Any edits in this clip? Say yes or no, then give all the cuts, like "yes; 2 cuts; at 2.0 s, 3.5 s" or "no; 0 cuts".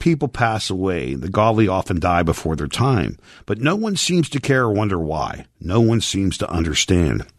no; 0 cuts